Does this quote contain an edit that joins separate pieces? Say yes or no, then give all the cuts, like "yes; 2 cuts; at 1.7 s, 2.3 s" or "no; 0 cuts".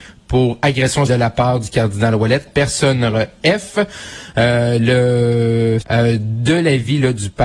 yes; 3 cuts; at 1.1 s, 2.5 s, 5.8 s